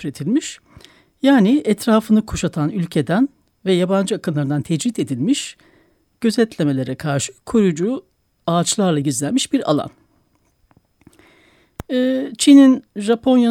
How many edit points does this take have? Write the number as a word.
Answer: zero